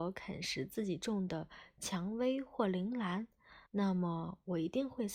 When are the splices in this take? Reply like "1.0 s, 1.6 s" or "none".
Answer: 3.7 s